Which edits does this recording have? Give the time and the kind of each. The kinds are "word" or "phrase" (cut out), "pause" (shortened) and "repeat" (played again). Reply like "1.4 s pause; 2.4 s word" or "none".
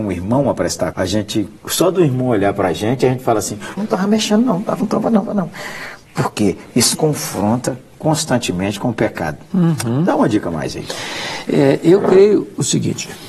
0.9 s word; 1.6 s pause; 3.8 s word; 4.8 s word; 5.2 s word; 6.9 s word

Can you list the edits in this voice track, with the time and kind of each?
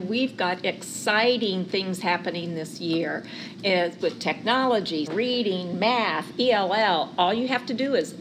4.0 s word; 5.1 s word

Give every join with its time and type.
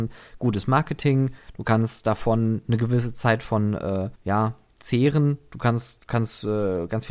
4.2 s pause

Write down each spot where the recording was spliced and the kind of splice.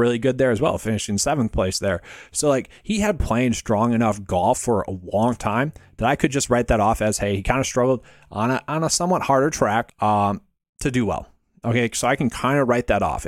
none

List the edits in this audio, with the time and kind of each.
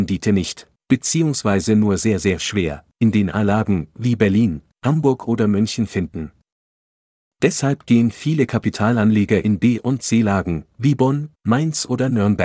none

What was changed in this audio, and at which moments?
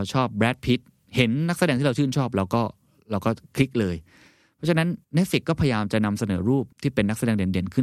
5.0 s pause; 6.7 s pause

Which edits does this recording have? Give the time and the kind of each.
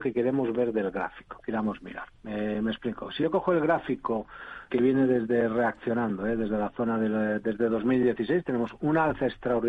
4.7 s word

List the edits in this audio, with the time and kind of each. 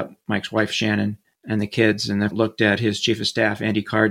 1.2 s pause; 2.3 s word

